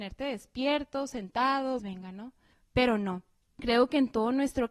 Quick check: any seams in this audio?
yes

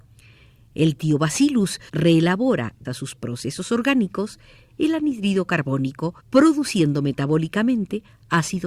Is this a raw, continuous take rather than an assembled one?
no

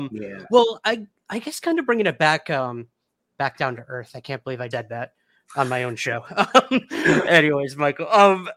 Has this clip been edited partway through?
yes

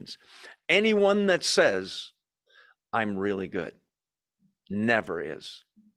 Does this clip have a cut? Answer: no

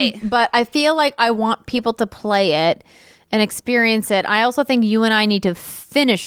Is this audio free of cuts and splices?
yes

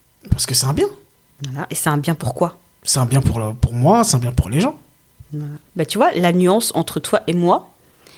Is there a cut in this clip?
yes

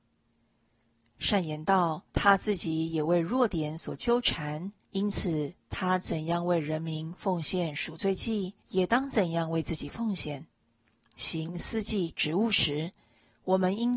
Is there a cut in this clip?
yes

